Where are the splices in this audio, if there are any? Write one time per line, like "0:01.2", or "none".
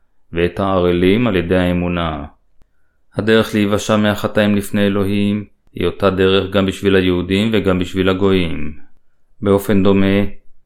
none